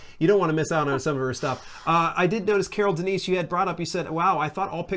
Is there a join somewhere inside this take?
no; 0 cuts

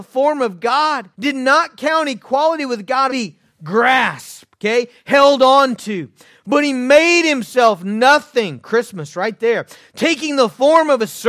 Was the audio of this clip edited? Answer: yes; 2 cuts; at 1.1 s, 3.1 s

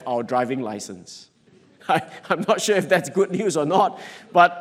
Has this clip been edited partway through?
yes; 1 cut; at 1.5 s

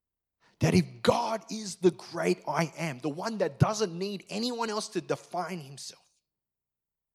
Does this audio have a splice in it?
no; 0 cuts

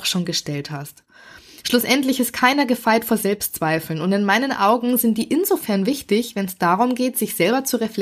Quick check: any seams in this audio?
no; 0 cuts

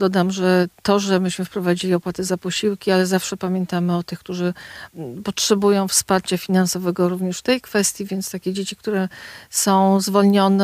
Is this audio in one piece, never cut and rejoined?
yes; 0 cuts

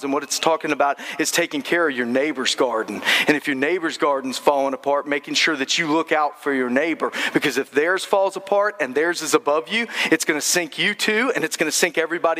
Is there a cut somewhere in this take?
no; 0 cuts

